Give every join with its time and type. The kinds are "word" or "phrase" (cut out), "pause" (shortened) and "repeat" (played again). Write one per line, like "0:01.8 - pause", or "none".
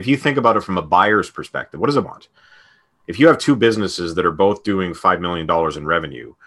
0:02.0 - word